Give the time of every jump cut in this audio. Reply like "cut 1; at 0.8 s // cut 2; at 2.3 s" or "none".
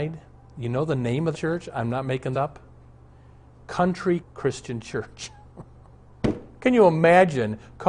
cut 1; at 1.3 s // cut 2; at 2.3 s // cut 3; at 4.2 s